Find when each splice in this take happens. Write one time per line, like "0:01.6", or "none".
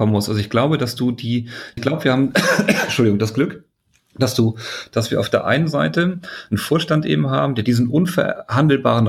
0:01.8